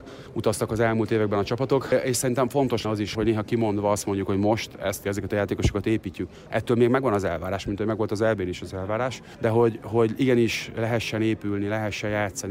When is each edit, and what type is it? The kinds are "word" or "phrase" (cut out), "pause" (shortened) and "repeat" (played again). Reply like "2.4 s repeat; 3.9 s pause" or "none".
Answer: 2.8 s word; 3.1 s word; 5.0 s word